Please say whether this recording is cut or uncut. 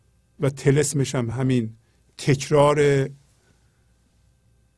uncut